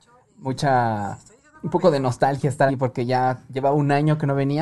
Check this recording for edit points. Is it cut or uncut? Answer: cut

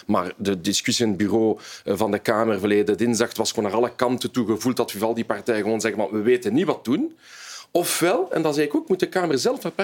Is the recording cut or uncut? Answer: uncut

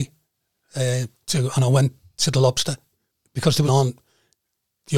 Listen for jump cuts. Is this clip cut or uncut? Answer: cut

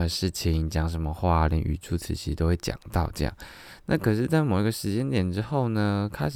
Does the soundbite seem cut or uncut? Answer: uncut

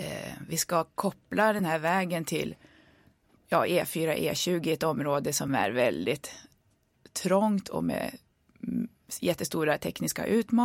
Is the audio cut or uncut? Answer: uncut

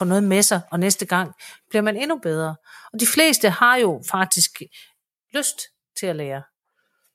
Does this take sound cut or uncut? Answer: uncut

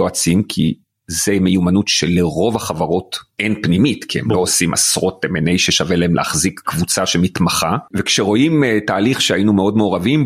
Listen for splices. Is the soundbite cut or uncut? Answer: uncut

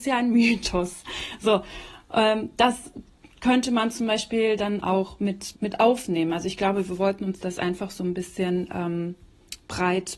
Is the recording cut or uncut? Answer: cut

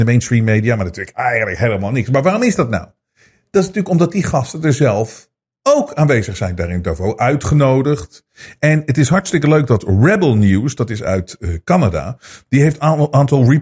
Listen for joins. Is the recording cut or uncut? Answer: uncut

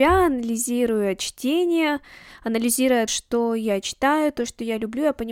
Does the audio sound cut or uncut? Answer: cut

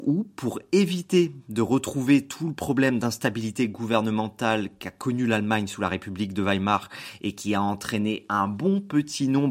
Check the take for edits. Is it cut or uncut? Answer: uncut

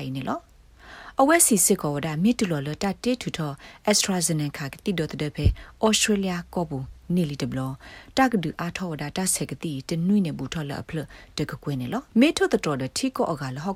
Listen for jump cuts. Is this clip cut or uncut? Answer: cut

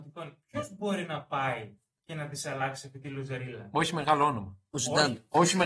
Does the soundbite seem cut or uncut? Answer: uncut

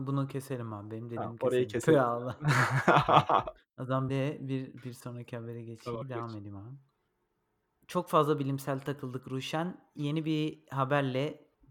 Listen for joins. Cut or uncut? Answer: cut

